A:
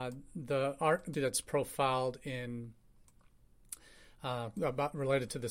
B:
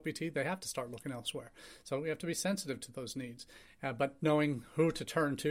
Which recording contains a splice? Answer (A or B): A